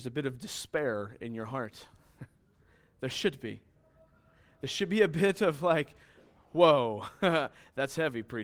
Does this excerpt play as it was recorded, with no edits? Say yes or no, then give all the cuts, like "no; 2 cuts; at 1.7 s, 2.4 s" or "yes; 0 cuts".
yes; 0 cuts